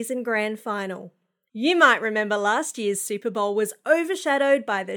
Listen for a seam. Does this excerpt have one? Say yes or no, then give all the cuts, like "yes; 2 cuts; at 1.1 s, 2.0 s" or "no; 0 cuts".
no; 0 cuts